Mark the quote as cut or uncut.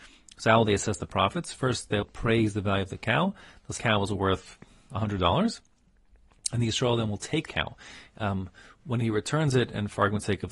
cut